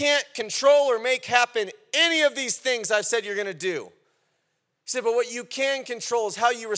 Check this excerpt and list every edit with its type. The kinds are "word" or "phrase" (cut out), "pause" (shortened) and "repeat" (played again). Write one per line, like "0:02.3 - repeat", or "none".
none